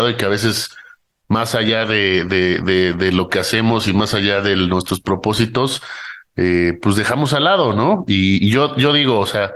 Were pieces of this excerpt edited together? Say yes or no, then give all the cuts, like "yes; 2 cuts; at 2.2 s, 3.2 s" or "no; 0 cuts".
yes; 1 cut; at 8.4 s